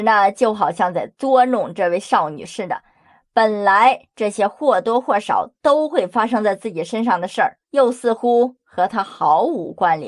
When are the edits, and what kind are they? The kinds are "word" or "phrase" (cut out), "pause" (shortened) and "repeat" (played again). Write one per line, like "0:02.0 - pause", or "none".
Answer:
0:07.6 - pause

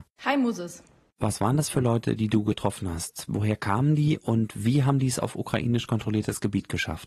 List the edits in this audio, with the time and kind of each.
none

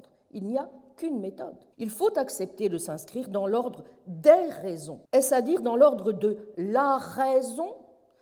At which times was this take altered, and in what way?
0:01.7 - pause
0:05.1 - pause

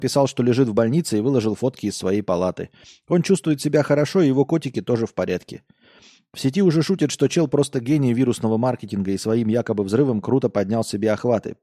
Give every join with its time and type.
none

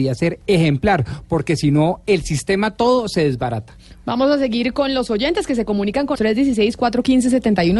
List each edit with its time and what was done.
0:06.1 - word

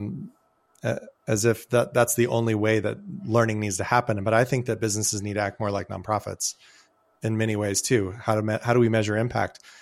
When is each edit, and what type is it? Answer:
none

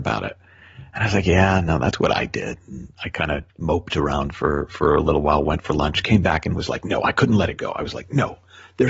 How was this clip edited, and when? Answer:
0:03.5 - pause

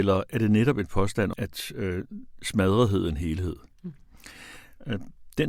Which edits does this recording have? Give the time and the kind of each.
0:01.3 - word
0:03.1 - word

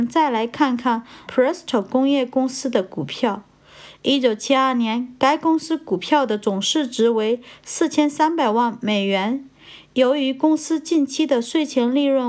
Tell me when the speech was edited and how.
0:01.3 - word

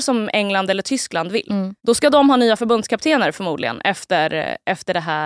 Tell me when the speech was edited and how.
0:01.8 - pause

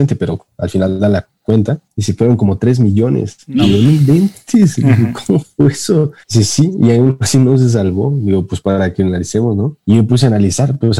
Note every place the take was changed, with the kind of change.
0:09.8 - pause

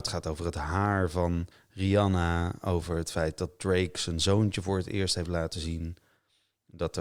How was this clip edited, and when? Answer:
0:01.5 - pause

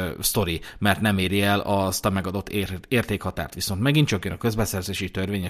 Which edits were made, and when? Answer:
none

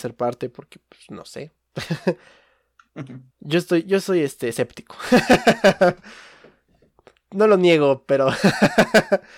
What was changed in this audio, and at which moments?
0:03.3 - pause

